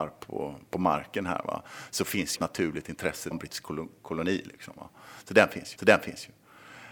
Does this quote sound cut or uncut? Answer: cut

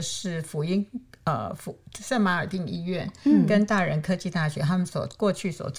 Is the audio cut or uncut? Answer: uncut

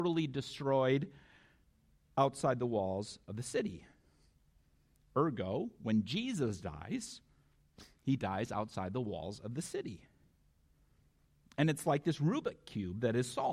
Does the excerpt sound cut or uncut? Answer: uncut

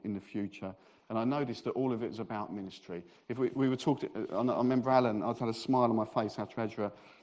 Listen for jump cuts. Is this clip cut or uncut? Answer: cut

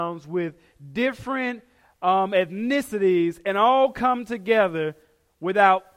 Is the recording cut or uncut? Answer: uncut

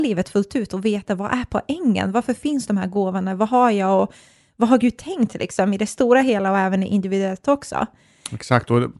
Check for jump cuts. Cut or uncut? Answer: uncut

